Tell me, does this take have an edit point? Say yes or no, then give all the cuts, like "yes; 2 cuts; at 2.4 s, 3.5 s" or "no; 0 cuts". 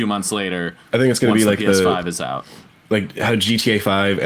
no; 0 cuts